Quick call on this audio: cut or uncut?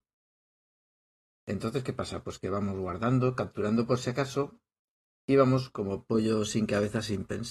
uncut